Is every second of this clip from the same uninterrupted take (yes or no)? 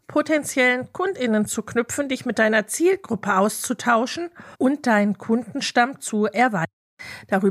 no